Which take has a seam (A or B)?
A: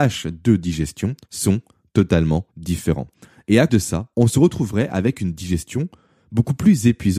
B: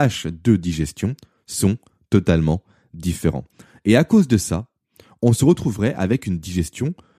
A